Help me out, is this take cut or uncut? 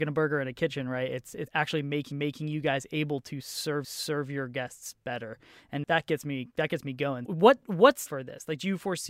cut